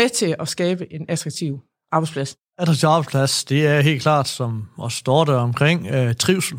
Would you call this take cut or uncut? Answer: uncut